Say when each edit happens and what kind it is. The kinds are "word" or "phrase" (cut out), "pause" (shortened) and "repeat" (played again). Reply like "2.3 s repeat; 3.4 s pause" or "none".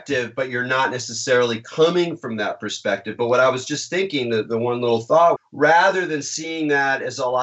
5.4 s phrase

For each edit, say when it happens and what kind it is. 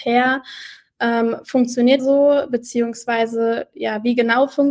2.0 s word

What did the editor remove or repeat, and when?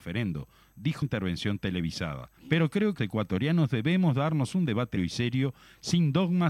1.0 s phrase; 2.4 s pause; 3.0 s word; 5.0 s word

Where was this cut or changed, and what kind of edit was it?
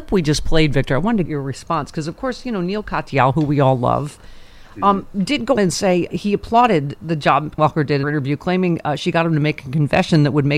1.3 s word; 5.6 s word; 6.1 s word; 7.0 s word; 7.6 s word; 8.0 s word

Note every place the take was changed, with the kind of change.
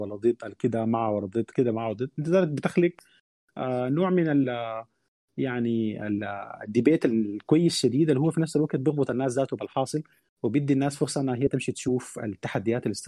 none

